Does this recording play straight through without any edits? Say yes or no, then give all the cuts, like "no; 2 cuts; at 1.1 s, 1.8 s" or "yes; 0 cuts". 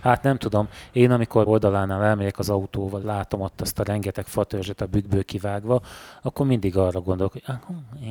no; 2 cuts; at 1.5 s, 3.0 s